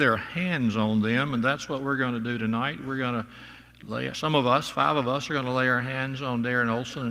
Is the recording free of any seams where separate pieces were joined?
yes; 0 cuts

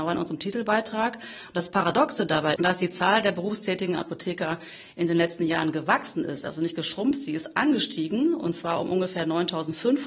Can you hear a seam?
yes; 2 cuts; at 2.6 s, 3.9 s

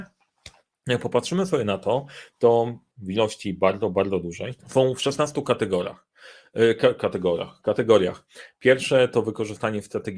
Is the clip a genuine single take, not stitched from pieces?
no; 2 cuts; at 2.9 s, 4.6 s

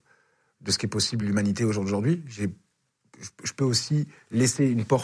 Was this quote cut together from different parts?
no; 0 cuts

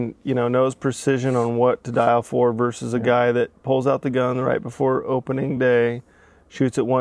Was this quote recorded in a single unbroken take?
yes; 0 cuts

